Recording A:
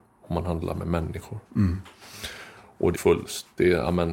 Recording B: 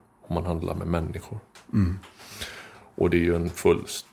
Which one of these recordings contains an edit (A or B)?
A